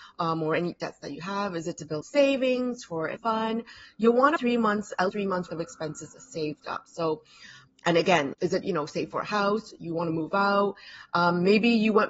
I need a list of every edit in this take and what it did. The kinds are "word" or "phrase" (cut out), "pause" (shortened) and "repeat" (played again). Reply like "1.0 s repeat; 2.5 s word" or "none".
2.0 s word; 3.2 s word; 4.4 s word; 5.1 s word; 5.5 s word; 7.7 s word; 8.3 s word; 8.6 s word

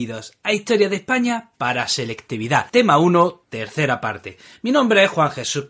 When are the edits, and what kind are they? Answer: 2.7 s pause

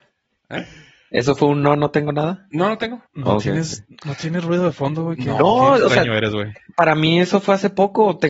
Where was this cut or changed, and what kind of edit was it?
3.1 s pause

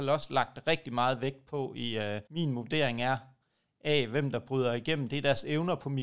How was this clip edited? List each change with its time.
2.3 s pause

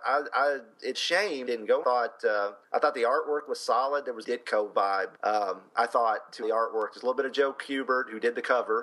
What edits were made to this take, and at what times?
0.9 s word; 1.5 s phrase; 1.8 s phrase; 2.6 s pause; 4.2 s phrase; 5.2 s pause; 6.4 s phrase

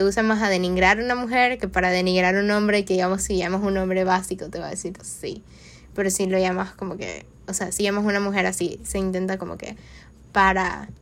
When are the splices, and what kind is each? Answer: 5.0 s word

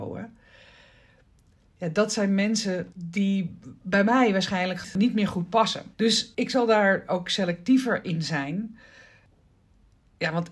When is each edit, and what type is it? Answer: 5.9 s pause

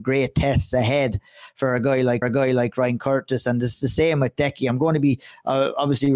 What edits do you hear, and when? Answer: 2.2 s repeat

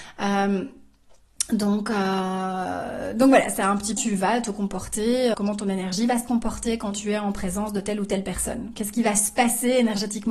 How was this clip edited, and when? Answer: 4.0 s phrase; 5.3 s word

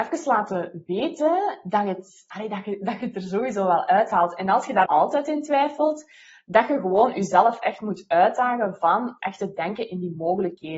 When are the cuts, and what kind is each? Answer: 4.9 s word; 9.2 s word

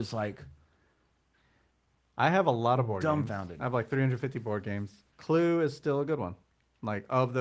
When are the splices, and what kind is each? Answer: 5.1 s pause

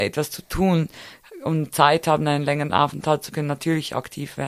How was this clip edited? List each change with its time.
3.3 s word

